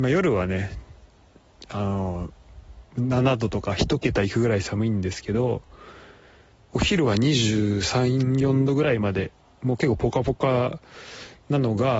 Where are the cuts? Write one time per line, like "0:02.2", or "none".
none